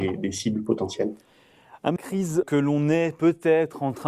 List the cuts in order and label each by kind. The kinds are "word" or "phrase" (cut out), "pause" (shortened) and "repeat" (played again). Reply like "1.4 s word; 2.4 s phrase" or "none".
2.0 s phrase; 2.4 s word

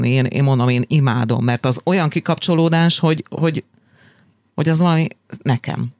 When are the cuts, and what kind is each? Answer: none

